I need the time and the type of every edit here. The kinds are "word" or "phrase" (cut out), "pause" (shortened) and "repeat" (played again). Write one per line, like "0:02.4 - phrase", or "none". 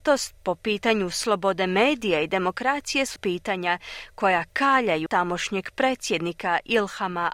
0:03.2 - word
0:05.1 - word